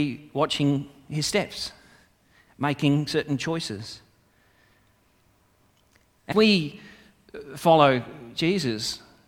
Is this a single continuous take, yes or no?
no